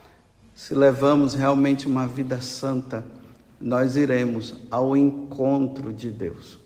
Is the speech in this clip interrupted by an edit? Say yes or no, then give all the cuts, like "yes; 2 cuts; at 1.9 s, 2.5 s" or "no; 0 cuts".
no; 0 cuts